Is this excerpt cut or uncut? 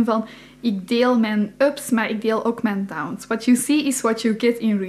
uncut